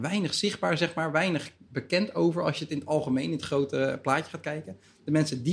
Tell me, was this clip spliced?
no; 0 cuts

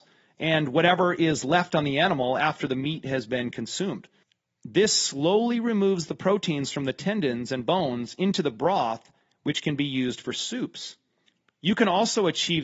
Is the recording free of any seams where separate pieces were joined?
yes; 0 cuts

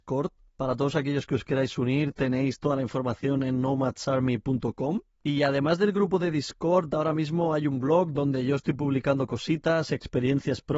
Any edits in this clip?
no; 0 cuts

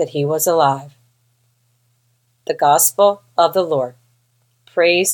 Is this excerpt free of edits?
yes; 0 cuts

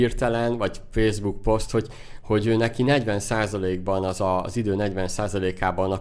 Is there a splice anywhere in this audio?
no; 0 cuts

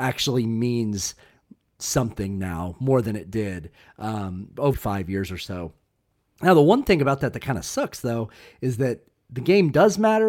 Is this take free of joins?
no; 1 cut; at 4.7 s

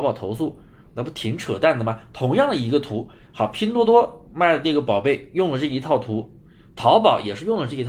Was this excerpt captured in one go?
yes; 0 cuts

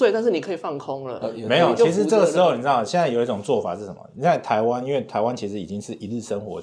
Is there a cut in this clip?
no; 0 cuts

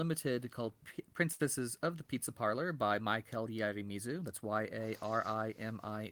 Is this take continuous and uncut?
yes; 0 cuts

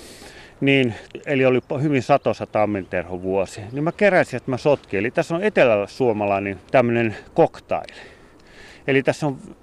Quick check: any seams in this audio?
yes; 1 cut; at 6.7 s

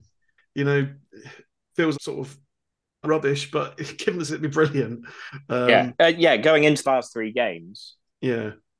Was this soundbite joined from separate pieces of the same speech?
yes; 4 cuts; at 1.9 s, 3.0 s, 4.3 s, 6.8 s

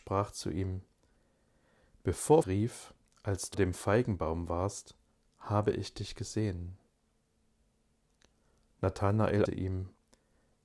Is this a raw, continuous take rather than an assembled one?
no; 3 cuts; at 2.4 s, 3.5 s, 9.4 s

